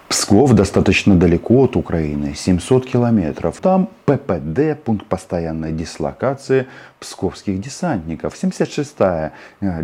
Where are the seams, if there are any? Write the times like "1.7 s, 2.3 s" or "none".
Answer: 3.6 s

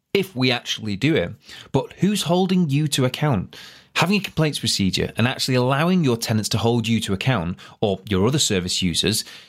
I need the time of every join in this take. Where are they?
none

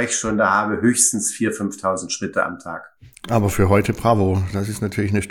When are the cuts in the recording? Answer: none

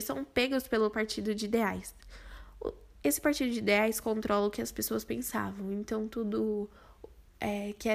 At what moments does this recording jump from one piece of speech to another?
none

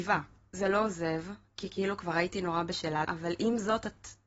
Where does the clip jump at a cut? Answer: 3.0 s

